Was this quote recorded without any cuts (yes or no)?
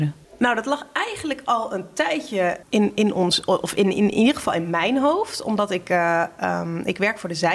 yes